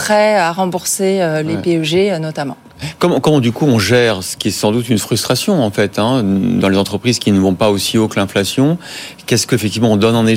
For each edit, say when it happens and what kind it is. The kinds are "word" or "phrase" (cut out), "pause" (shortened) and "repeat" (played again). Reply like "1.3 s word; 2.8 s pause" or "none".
none